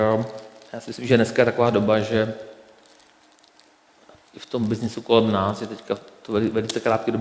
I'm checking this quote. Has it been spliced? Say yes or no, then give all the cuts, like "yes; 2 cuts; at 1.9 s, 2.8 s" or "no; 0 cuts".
no; 0 cuts